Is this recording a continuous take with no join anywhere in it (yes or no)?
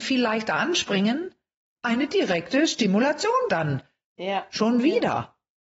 no